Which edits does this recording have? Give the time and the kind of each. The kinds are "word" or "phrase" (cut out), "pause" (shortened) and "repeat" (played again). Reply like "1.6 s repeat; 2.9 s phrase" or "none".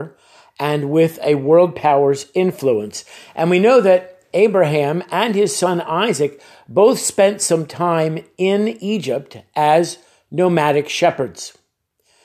none